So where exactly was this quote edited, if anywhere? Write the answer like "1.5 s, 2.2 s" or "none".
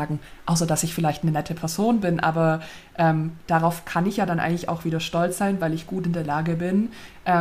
none